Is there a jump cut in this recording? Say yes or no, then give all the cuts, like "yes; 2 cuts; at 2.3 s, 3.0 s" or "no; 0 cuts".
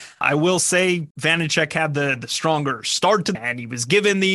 yes; 2 cuts; at 1.1 s, 3.3 s